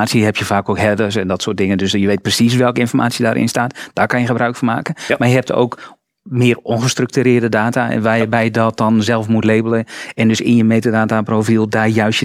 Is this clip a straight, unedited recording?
yes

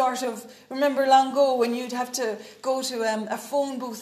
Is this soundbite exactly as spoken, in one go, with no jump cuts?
yes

